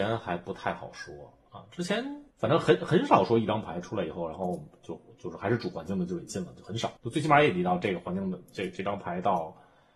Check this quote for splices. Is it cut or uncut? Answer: cut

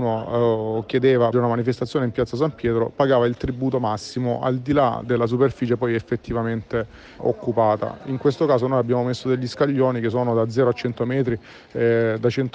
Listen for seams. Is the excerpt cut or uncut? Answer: cut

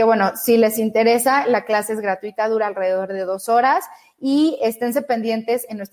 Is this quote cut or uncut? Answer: uncut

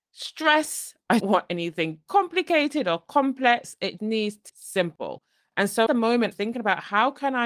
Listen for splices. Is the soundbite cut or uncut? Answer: cut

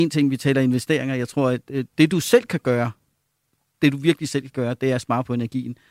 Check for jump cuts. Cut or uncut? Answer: uncut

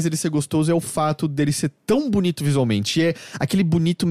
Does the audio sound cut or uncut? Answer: uncut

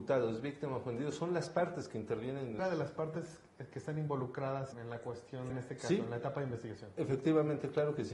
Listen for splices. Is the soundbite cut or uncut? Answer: cut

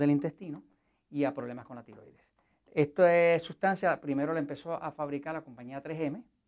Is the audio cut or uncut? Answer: uncut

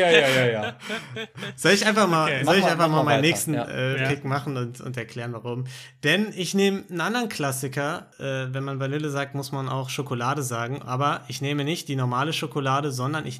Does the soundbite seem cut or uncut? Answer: uncut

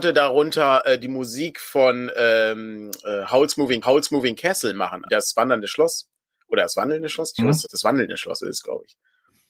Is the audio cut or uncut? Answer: cut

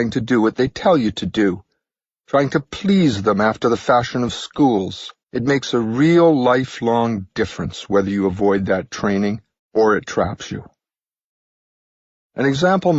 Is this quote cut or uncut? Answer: cut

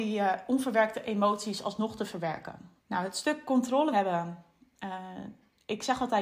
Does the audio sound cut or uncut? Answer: cut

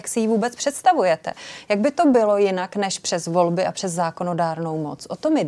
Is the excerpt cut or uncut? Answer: uncut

